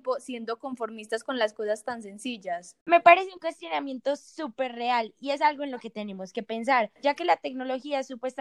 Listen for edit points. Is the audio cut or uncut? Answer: cut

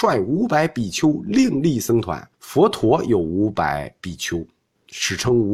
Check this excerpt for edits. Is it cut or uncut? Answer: cut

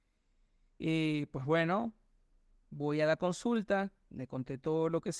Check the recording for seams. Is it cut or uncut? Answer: uncut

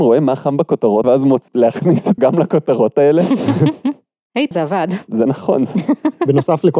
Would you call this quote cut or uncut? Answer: cut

